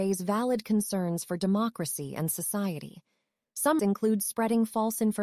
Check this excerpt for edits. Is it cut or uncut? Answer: cut